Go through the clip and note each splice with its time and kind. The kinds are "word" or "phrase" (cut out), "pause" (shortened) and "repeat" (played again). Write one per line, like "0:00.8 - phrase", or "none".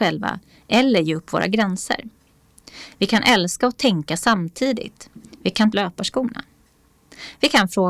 0:05.7 - phrase